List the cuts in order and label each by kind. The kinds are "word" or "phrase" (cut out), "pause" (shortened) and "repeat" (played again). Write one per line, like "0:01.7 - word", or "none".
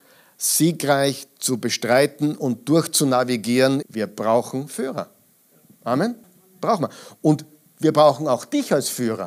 0:03.8 - word
0:06.2 - pause